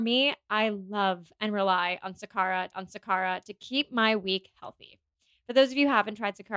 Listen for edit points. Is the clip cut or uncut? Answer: cut